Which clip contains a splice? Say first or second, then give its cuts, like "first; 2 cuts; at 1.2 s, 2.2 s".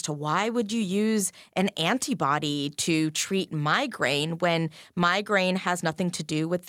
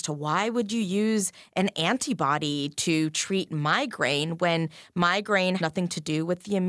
second; 1 cut; at 5.6 s